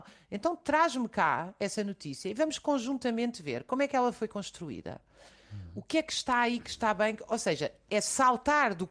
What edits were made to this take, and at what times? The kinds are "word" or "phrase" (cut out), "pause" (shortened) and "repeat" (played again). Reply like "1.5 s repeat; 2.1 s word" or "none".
none